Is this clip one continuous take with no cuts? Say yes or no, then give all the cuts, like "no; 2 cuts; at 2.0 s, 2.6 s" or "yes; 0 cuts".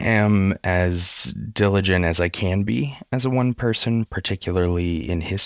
no; 1 cut; at 4.1 s